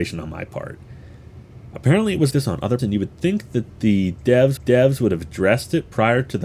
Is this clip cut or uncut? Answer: cut